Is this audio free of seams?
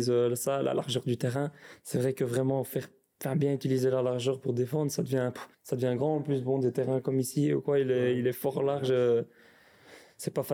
no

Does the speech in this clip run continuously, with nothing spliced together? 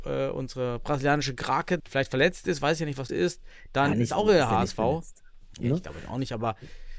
no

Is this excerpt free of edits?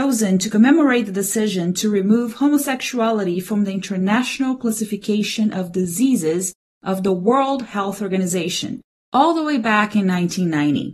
yes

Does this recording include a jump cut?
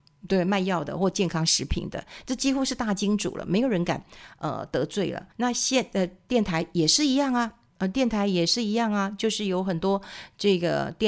yes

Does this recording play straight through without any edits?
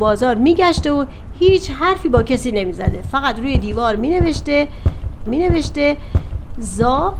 no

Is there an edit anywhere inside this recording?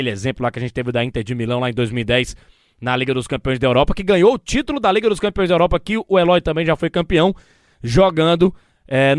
no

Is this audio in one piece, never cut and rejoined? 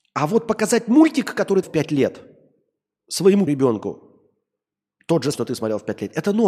no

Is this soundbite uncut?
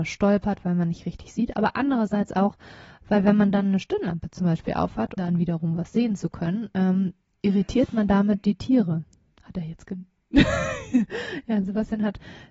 no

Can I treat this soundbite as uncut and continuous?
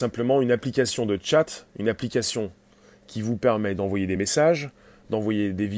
yes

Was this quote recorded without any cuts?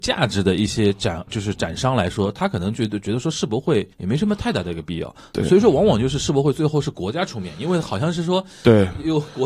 no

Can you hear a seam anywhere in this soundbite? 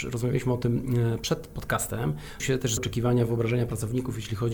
yes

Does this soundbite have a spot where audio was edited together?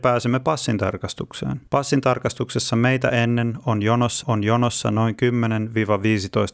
yes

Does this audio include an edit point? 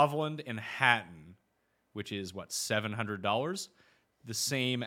no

